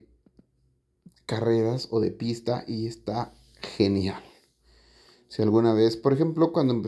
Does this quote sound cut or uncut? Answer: uncut